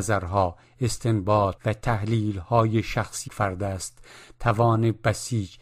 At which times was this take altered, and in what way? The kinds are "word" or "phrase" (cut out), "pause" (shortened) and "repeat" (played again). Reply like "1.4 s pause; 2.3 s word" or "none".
1.6 s word; 3.3 s word